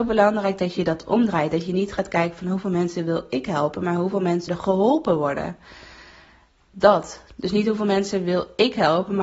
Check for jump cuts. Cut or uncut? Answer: cut